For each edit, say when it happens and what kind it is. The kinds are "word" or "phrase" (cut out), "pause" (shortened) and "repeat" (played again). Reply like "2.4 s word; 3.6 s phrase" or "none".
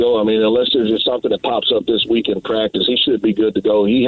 none